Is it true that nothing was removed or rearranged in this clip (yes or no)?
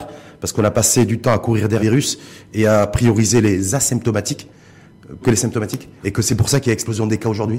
no